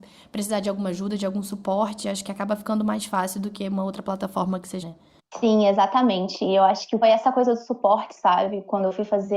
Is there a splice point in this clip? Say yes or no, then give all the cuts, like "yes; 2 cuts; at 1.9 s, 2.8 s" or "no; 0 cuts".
yes; 3 cuts; at 4.8 s, 5.2 s, 7.0 s